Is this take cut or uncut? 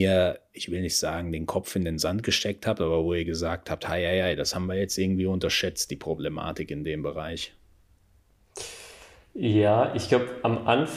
uncut